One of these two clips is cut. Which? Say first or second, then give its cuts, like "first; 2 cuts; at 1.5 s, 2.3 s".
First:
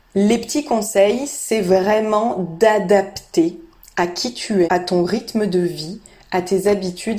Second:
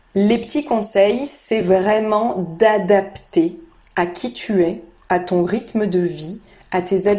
first; 1 cut; at 4.6 s